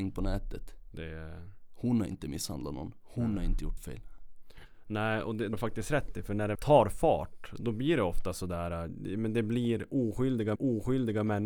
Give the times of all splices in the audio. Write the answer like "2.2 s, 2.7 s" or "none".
3.8 s, 5.5 s, 6.5 s, 10.5 s